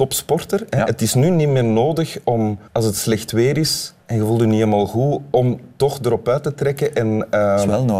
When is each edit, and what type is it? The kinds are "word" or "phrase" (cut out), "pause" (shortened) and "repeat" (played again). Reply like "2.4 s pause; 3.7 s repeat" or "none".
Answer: 2.7 s pause; 4.0 s pause